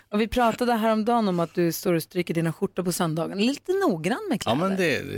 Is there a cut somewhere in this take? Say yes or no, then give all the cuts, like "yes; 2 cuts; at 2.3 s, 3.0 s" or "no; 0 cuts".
no; 0 cuts